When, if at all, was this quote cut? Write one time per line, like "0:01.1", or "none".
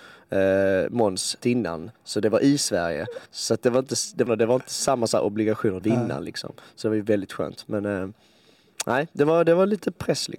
0:01.4
0:02.0
0:03.3
0:04.3
0:05.8